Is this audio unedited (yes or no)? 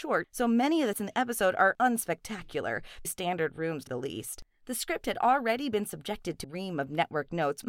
no